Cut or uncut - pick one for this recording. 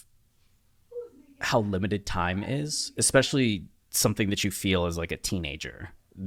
uncut